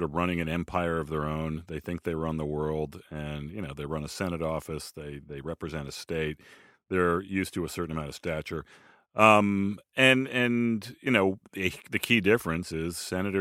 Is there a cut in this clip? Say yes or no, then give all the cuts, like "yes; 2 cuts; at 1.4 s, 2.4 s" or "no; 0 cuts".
no; 0 cuts